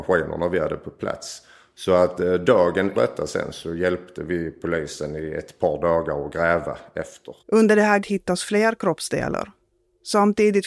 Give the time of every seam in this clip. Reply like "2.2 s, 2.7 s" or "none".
2.9 s, 7.4 s, 8.0 s